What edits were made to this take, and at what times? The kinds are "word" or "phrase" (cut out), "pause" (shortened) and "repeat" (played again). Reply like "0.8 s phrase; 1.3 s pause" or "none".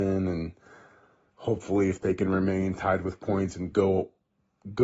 none